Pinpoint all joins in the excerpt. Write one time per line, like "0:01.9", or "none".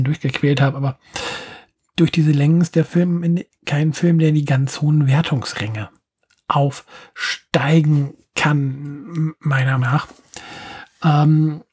0:09.8

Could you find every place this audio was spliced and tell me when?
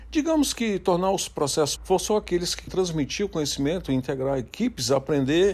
0:01.8
0:02.7

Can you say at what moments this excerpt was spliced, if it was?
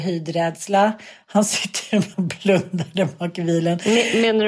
0:02.1

